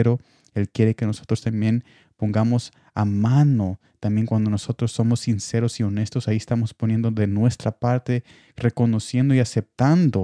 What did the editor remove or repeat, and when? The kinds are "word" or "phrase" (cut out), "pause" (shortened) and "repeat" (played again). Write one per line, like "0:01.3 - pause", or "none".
none